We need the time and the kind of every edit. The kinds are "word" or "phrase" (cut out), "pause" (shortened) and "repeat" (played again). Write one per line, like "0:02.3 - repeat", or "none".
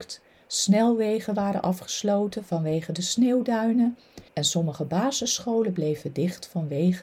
0:04.3 - pause